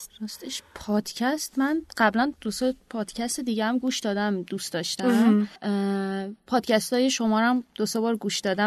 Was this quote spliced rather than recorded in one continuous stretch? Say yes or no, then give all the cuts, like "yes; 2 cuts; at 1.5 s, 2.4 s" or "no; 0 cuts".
yes; 3 cuts; at 2.3 s, 5.6 s, 6.4 s